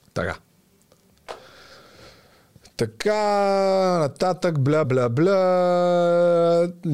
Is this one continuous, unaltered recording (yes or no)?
no